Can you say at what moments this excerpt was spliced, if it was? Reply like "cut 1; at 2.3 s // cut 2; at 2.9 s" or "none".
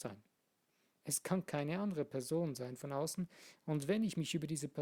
none